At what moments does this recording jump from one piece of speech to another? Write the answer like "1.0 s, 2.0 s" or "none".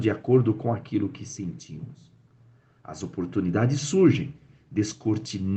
none